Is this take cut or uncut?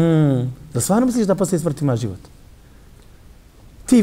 uncut